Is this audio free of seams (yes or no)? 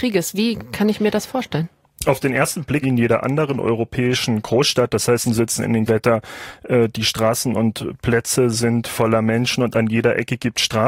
no